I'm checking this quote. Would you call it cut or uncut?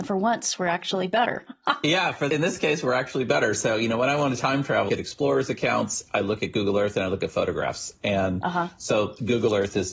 cut